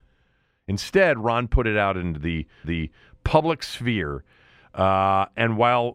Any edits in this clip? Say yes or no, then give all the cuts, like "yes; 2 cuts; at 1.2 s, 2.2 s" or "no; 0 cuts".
yes; 1 cut; at 2.6 s